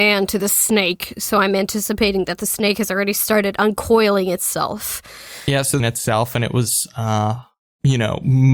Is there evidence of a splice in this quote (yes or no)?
yes